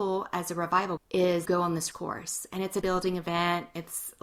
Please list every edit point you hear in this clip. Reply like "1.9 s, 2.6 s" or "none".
1.0 s, 1.5 s, 1.9 s, 2.8 s